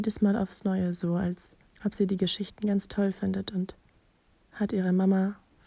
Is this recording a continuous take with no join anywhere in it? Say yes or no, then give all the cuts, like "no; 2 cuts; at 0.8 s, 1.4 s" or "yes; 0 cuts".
no; 1 cut; at 1.7 s